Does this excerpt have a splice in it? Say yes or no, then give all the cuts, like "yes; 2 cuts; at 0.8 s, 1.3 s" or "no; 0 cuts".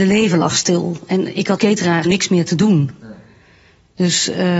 yes; 2 cuts; at 1.6 s, 2.1 s